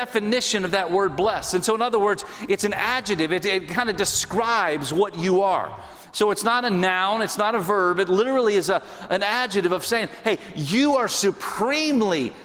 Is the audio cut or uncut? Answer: uncut